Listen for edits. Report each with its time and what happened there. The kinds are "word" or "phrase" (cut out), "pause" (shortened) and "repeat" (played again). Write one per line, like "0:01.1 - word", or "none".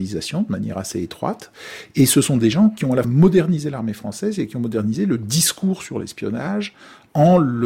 0:03.0 - word